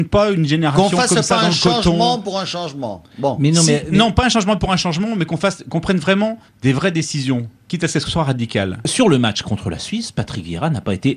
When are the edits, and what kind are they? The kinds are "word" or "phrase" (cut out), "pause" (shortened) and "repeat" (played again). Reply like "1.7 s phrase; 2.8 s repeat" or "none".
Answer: 6.5 s pause